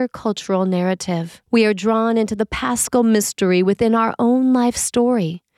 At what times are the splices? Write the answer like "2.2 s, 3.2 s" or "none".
1.5 s